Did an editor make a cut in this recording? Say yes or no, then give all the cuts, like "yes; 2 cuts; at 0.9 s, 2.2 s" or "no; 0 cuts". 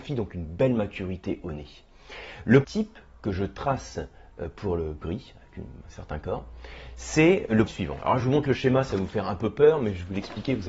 yes; 4 cuts; at 2.6 s, 5.0 s, 5.8 s, 7.7 s